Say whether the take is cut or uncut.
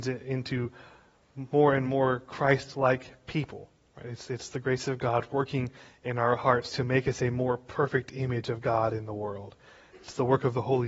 uncut